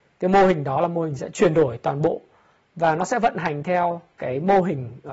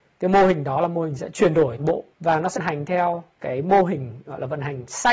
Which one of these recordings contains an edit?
second; 3 cuts; at 1.8 s, 2.1 s, 2.5 s

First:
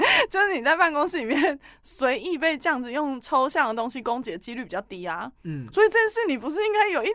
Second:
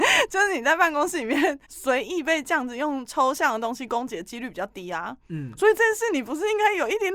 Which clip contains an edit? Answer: second; 1 cut; at 1.6 s

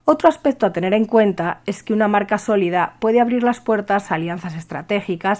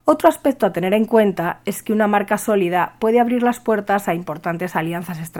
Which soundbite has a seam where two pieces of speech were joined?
first; 1 cut; at 4.1 s

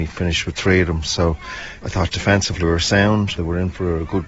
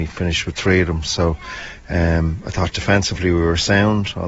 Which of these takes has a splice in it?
first; 3 cuts; at 1.8 s, 2.6 s, 3.4 s

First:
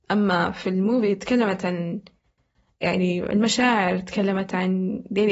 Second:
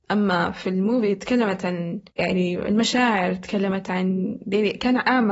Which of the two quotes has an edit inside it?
second; 1 cut; at 2.1 s

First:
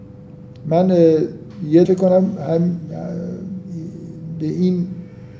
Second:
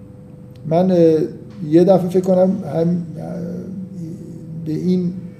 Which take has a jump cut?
first; 1 cut; at 1.8 s

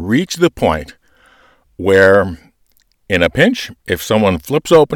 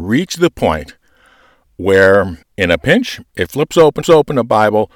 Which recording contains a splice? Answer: second; 3 cuts; at 2.4 s, 3.5 s, 4.0 s

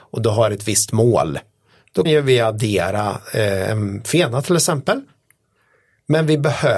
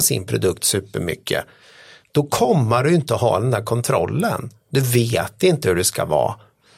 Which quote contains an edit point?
first; 1 cut; at 2.1 s

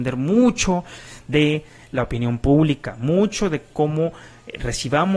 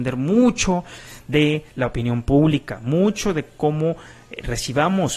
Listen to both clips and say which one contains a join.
second; 1 cut; at 1.7 s

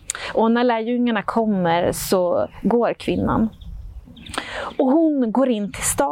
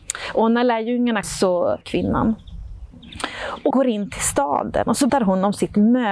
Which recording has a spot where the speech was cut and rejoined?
second; 4 cuts; at 1.2 s, 1.8 s, 3.7 s, 5.1 s

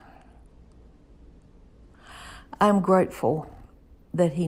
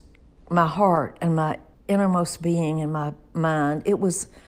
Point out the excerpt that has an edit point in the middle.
second; 1 cut; at 1.7 s

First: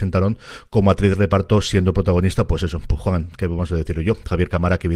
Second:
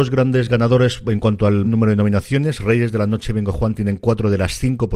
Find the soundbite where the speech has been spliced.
second; 1 cut; at 1.6 s

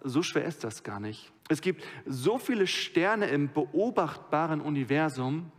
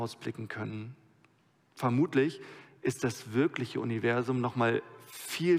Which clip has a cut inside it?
first; 1 cut; at 1.4 s

